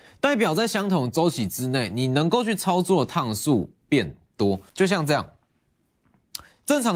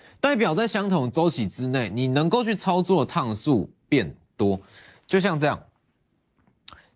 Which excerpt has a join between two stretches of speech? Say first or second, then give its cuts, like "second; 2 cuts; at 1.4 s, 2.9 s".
first; 1 cut; at 4.7 s